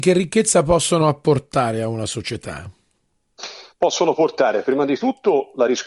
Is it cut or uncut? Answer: uncut